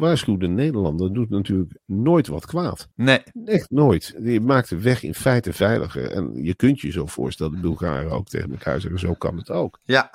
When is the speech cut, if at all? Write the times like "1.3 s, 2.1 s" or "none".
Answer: 2.9 s